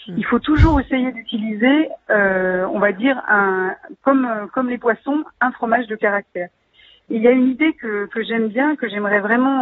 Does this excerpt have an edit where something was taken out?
no; 0 cuts

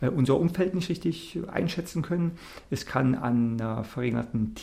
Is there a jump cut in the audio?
no; 0 cuts

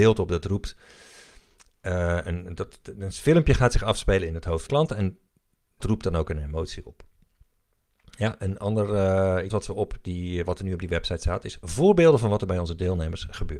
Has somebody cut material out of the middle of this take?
yes; 3 cuts; at 4.7 s, 5.8 s, 9.5 s

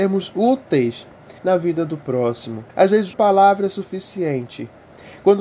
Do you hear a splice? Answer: yes; 3 cuts; at 1.4 s, 2.7 s, 3.1 s

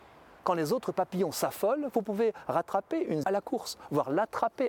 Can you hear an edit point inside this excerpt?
yes; 1 cut; at 3.2 s

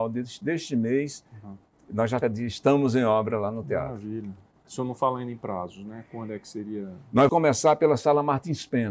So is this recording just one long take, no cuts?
no; 2 cuts; at 2.2 s, 7.3 s

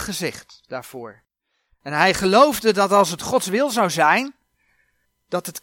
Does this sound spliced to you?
no; 0 cuts

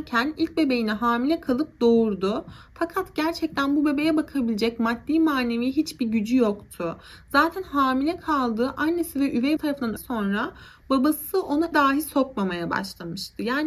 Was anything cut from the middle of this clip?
yes; 3 cuts; at 9.6 s, 10.0 s, 11.7 s

